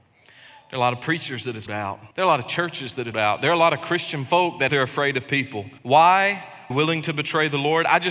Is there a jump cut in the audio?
yes; 6 cuts; at 1.7 s, 2.1 s, 3.1 s, 4.7 s, 5.8 s, 6.7 s

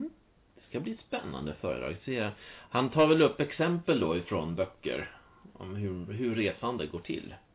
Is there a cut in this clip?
no; 0 cuts

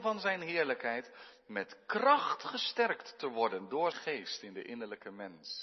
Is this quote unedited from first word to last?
no; 1 cut; at 3.9 s

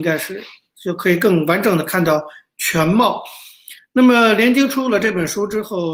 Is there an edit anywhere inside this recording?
no; 0 cuts

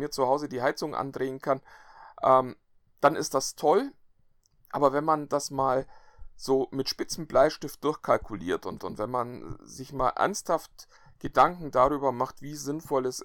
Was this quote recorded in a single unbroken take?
no; 1 cut; at 8.8 s

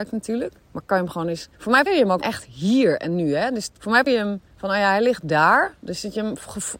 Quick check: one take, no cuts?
no; 6 cuts; at 1.5 s, 1.9 s, 2.2 s, 3.8 s, 4.1 s, 4.5 s

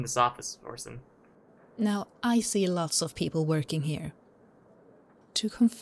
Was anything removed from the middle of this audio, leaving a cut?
no; 0 cuts

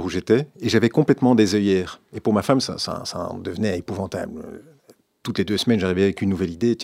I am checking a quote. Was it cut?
no; 0 cuts

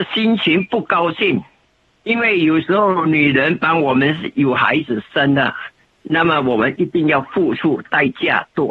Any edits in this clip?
yes; 2 cuts; at 1.9 s, 5.8 s

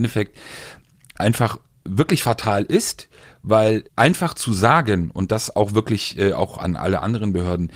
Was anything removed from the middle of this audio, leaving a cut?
yes; 1 cut; at 3.9 s

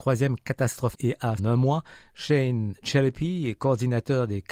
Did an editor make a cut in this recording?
yes; 3 cuts; at 0.9 s, 1.4 s, 2.8 s

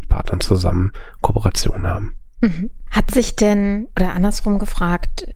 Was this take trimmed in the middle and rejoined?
no; 0 cuts

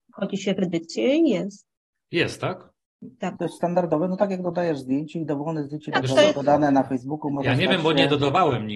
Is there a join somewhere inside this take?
yes; 1 cut; at 3.4 s

